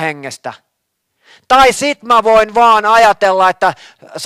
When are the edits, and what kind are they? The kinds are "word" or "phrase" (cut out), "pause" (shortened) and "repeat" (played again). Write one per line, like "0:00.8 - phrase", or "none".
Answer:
none